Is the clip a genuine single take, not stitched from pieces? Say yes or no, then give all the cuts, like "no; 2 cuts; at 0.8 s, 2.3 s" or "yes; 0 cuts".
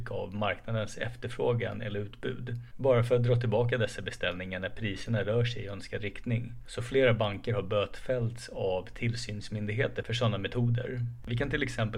yes; 0 cuts